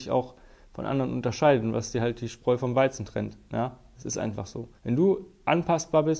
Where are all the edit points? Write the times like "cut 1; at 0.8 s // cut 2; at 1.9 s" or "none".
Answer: cut 1; at 4.8 s